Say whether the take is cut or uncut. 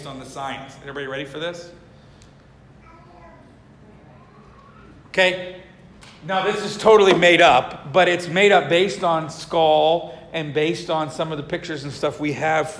uncut